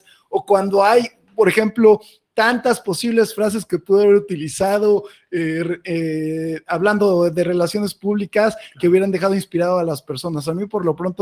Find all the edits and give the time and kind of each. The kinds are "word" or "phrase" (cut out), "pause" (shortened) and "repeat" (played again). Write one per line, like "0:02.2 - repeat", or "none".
none